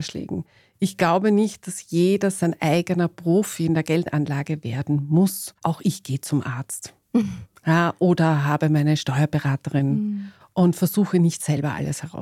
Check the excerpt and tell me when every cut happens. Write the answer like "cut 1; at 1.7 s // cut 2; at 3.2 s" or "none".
cut 1; at 5.6 s

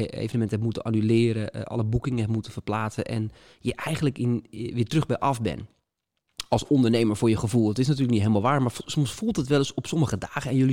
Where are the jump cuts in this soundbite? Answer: none

